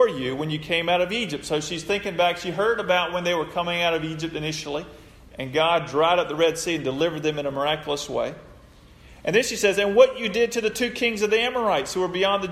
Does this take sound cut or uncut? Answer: uncut